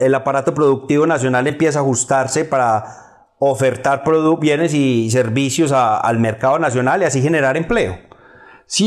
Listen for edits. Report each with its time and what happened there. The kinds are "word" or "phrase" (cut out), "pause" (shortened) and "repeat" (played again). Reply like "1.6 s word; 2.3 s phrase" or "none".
none